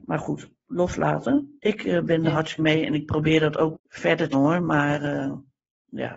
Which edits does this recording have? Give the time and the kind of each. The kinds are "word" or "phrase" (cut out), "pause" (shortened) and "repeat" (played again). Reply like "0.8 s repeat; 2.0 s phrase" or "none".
2.6 s word; 3.7 s word; 4.3 s word